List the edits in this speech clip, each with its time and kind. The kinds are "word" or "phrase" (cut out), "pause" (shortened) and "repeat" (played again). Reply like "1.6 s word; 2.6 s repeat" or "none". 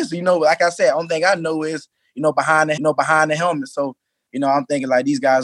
2.8 s repeat